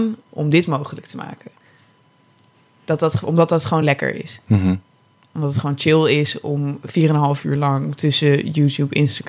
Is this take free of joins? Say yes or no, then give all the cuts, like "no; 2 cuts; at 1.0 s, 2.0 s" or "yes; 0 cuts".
yes; 0 cuts